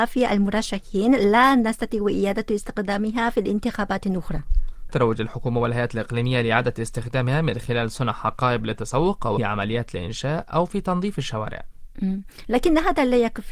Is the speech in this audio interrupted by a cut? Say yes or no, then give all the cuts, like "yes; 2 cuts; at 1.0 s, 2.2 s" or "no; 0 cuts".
yes; 2 cuts; at 4.9 s, 9.4 s